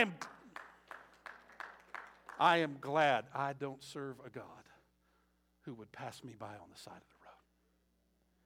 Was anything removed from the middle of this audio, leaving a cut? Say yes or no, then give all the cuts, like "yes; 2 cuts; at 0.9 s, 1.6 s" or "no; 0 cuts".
no; 0 cuts